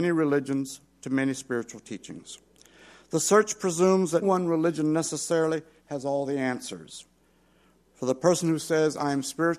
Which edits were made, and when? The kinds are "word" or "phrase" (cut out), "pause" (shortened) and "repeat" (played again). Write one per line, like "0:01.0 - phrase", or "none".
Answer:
0:04.2 - word